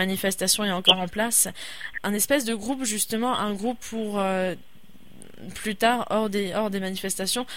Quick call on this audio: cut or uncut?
cut